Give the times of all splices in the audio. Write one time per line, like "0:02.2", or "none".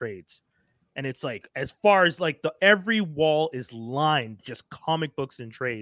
none